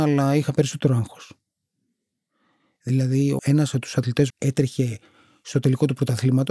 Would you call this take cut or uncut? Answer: cut